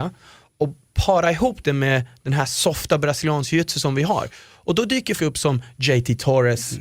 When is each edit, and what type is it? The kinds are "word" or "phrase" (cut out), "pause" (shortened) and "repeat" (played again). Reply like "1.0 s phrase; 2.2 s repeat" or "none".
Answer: 5.2 s word